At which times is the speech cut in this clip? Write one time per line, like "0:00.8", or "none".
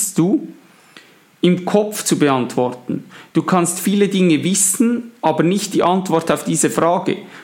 none